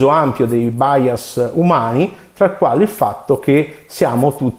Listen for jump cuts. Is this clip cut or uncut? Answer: uncut